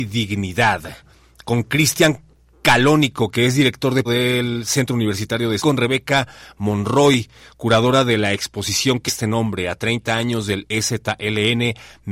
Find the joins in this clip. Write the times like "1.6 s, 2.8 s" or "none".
4.0 s, 5.6 s, 9.1 s